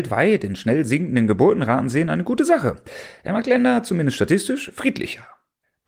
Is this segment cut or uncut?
uncut